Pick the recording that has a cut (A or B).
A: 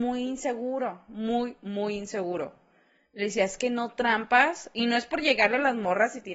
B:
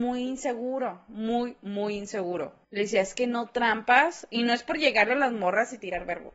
B